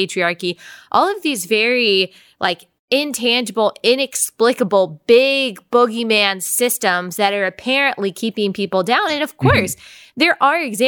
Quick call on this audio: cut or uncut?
uncut